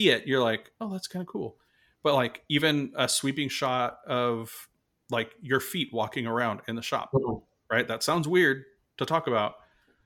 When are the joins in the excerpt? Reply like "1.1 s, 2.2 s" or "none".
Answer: none